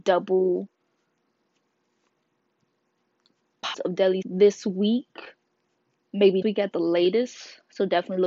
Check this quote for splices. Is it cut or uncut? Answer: cut